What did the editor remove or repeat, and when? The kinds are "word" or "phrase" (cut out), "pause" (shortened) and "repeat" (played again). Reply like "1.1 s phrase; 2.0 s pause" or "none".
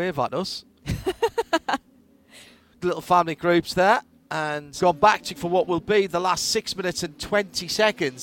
2.8 s word; 4.8 s word; 5.3 s word